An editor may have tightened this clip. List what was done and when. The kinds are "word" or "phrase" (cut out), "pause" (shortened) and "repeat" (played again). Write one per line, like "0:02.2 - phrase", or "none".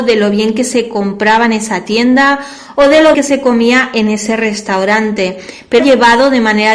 0:03.1 - word
0:05.8 - word